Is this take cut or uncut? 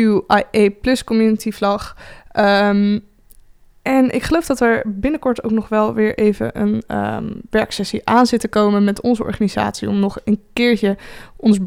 uncut